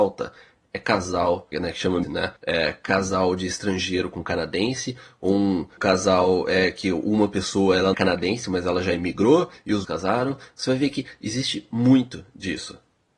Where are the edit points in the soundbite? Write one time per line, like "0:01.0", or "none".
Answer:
0:01.5
0:02.0
0:02.4
0:05.8
0:07.9
0:09.8